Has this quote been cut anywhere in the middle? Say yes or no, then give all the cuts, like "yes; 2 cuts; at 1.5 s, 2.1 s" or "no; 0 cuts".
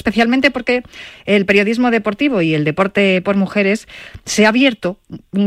yes; 1 cut; at 3.2 s